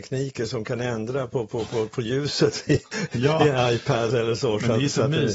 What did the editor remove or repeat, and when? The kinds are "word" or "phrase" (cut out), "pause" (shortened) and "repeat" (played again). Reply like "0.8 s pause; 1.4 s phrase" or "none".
4.1 s word